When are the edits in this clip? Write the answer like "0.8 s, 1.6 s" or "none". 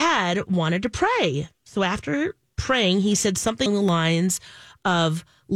3.7 s